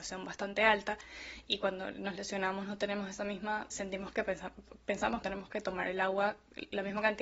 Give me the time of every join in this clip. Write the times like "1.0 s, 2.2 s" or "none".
3.7 s, 5.2 s